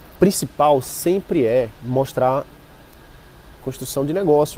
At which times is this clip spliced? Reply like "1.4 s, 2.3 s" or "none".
1.8 s, 3.6 s